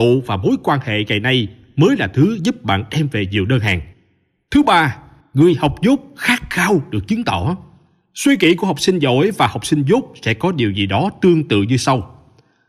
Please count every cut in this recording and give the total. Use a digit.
0